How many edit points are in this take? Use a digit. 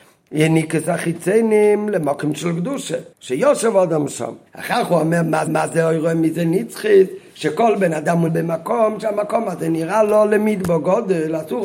4